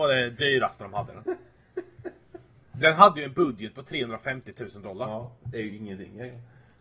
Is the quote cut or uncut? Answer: uncut